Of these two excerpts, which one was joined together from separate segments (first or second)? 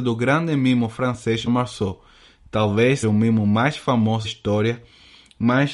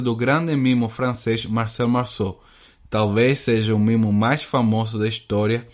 first